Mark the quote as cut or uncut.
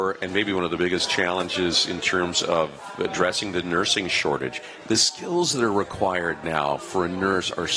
uncut